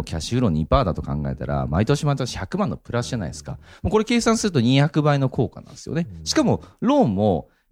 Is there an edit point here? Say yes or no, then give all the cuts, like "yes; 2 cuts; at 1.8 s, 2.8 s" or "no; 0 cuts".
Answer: no; 0 cuts